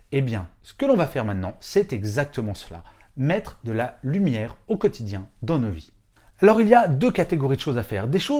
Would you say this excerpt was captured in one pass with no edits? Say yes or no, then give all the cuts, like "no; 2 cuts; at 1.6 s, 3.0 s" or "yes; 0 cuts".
yes; 0 cuts